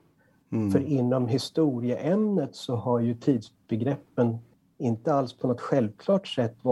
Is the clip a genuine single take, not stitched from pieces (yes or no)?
no